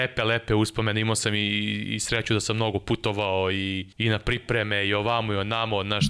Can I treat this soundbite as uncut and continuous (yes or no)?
no